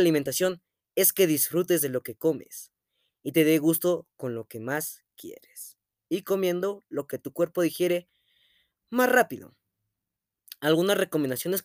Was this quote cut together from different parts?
no; 0 cuts

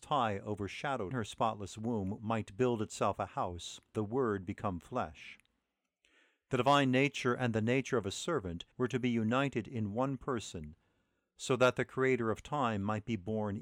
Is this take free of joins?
no; 4 cuts; at 1.1 s, 2.2 s, 3.9 s, 8.7 s

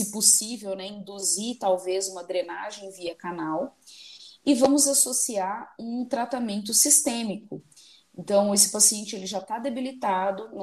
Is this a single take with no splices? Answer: yes; 0 cuts

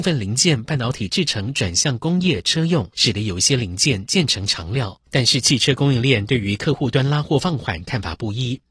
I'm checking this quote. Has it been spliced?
yes; 2 cuts; at 2.9 s, 5.1 s

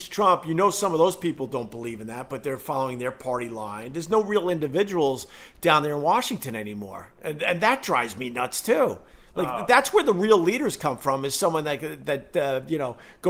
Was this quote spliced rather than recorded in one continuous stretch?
no; 0 cuts

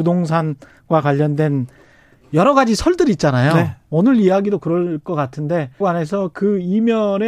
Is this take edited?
yes; 1 cut; at 5.8 s

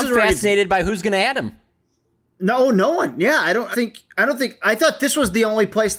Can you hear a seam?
yes; 1 cut; at 3.7 s

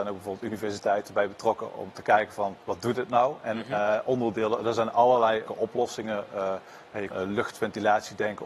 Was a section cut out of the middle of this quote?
yes; 3 cuts; at 2.6 s, 5.5 s, 7.1 s

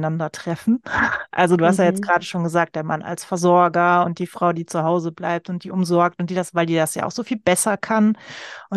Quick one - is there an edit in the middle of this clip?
no; 0 cuts

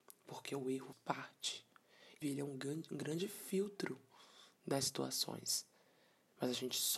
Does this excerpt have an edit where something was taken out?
yes; 2 cuts; at 0.9 s, 2.2 s

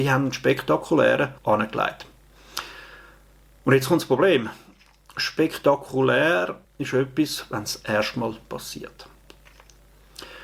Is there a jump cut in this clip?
yes; 2 cuts; at 1.4 s, 6.6 s

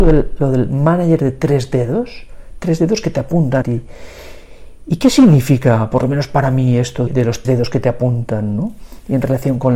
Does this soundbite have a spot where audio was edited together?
yes; 3 cuts; at 3.6 s, 7.1 s, 7.4 s

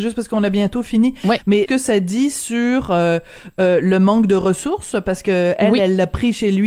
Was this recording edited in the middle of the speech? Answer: yes; 1 cut; at 1.7 s

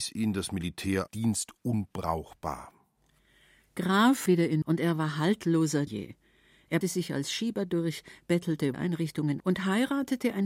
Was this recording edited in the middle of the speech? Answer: yes; 7 cuts; at 1.1 s, 4.3 s, 4.6 s, 5.9 s, 6.8 s, 8.7 s, 9.4 s

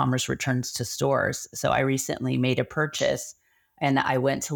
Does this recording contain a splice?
no; 0 cuts

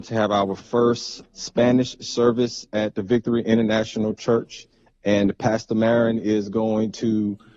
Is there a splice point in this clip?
yes; 1 cut; at 1.2 s

